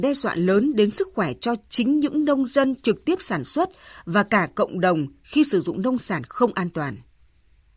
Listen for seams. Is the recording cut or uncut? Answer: uncut